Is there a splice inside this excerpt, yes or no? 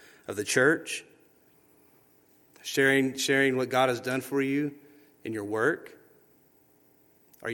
no